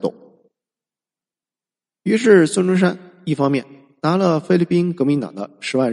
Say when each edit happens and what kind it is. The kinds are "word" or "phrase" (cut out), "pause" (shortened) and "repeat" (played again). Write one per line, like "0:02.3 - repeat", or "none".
none